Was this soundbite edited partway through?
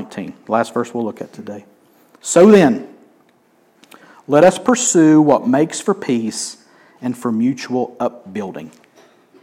no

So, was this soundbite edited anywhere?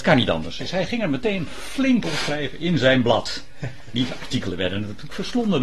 yes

